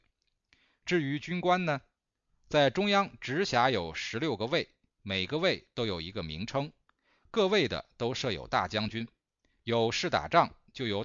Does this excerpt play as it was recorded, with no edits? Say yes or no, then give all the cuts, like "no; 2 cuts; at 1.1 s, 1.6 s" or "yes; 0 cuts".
yes; 0 cuts